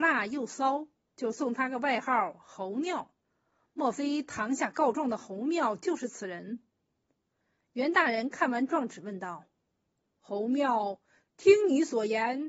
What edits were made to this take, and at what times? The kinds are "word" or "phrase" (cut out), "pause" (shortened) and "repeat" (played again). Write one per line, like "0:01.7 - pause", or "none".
0:03.2 - pause